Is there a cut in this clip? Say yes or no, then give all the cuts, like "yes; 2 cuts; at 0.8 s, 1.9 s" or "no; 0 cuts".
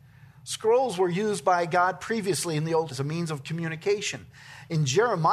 yes; 1 cut; at 2.9 s